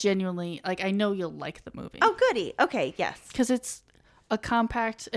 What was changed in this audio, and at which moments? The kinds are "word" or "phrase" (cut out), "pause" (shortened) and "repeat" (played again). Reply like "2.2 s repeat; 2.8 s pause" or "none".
none